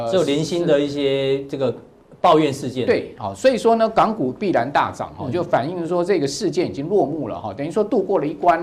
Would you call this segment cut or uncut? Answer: uncut